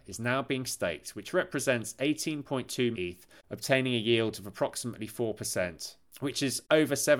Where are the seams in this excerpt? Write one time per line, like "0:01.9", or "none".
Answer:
0:02.9